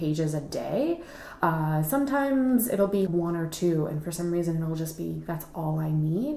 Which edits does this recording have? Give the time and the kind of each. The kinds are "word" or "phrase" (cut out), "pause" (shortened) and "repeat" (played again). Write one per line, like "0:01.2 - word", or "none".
0:03.1 - word